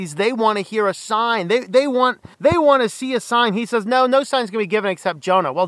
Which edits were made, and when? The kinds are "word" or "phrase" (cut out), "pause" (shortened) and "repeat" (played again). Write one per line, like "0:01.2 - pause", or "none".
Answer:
0:02.3 - pause

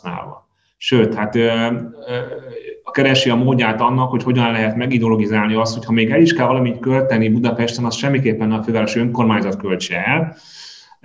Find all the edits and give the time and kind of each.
none

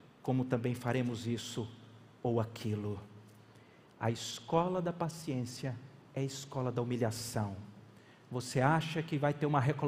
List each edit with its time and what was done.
none

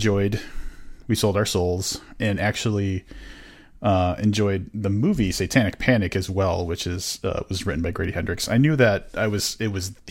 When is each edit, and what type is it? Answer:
none

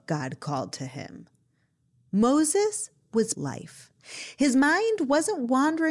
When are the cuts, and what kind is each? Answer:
0:03.3 - phrase

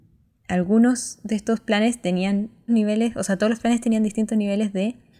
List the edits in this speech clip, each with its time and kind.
0:02.7 - word

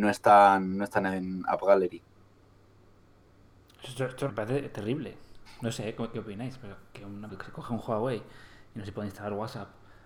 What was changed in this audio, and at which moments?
0:04.3 - word
0:07.3 - word

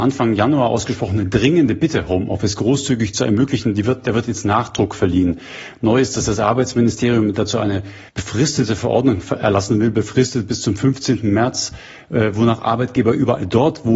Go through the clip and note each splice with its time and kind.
0:08.1 - pause

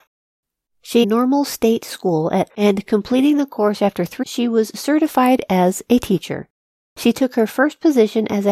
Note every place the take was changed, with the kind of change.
0:01.0 - phrase
0:02.5 - word
0:04.2 - word

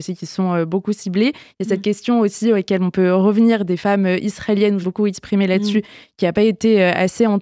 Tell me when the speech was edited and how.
0:04.8 - word

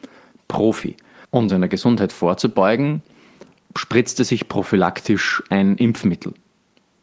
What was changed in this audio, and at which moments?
0:01.5 - word
0:03.6 - pause

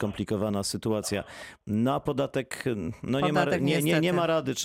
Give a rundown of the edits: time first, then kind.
none

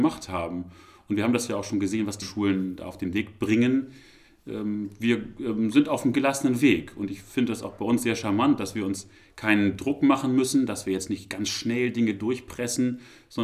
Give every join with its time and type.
0:02.2 - word
0:06.1 - word

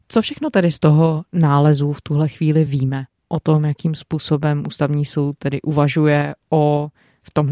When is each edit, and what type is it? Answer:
none

